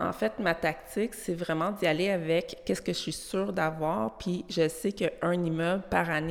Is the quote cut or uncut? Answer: uncut